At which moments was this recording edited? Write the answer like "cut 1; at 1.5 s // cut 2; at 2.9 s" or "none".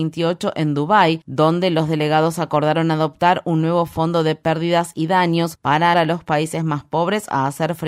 cut 1; at 5.9 s

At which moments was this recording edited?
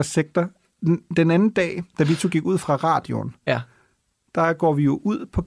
none

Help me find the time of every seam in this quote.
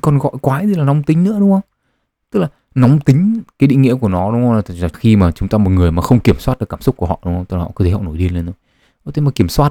cut 1; at 4.9 s

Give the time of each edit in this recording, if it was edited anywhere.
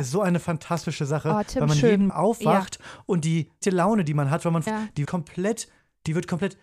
cut 1; at 2.1 s // cut 2; at 3.6 s // cut 3; at 4.7 s // cut 4; at 5.0 s

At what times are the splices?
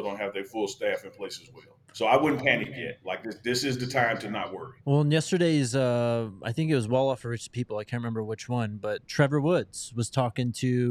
cut 1; at 1.8 s // cut 2; at 4.8 s

